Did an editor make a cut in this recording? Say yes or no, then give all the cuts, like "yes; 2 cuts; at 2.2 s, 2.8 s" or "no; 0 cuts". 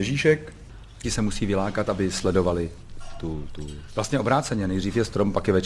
yes; 1 cut; at 1.0 s